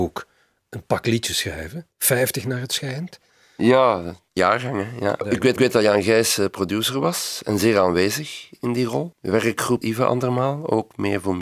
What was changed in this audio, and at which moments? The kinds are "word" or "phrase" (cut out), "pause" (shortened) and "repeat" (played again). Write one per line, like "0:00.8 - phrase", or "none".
0:01.3 - word
0:01.9 - pause
0:04.4 - phrase
0:05.6 - repeat
0:09.8 - phrase